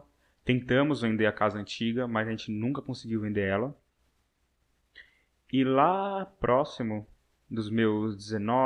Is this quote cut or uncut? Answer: uncut